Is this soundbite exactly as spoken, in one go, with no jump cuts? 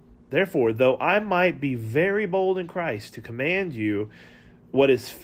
yes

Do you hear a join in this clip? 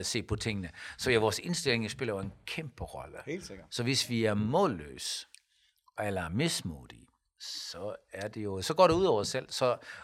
no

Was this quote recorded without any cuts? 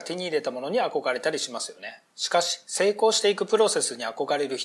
no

